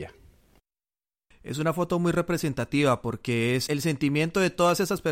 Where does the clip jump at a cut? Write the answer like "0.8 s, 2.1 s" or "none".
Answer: 3.7 s